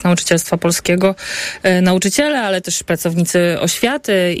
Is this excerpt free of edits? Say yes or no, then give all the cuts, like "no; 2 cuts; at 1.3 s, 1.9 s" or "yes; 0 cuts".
yes; 0 cuts